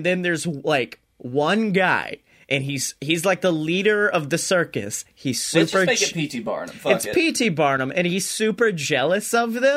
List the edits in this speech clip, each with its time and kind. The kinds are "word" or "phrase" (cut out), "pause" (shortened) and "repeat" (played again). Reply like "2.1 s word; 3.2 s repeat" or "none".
none